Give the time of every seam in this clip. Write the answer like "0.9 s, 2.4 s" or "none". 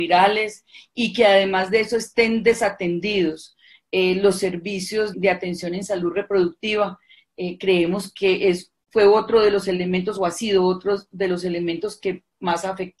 5.1 s